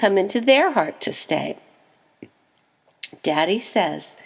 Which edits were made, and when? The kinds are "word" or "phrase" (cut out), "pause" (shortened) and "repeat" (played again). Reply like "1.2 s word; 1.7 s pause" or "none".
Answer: none